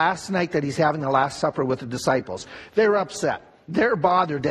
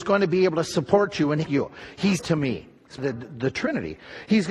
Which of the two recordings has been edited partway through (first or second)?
second